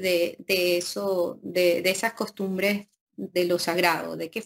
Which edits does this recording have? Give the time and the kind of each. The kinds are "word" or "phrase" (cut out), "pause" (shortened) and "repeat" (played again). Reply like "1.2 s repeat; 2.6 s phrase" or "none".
none